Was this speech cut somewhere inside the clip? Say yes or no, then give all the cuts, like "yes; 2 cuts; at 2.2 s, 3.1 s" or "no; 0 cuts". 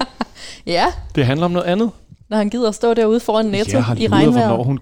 yes; 1 cut; at 2.2 s